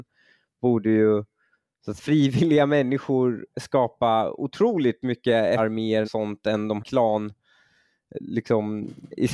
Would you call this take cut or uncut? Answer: cut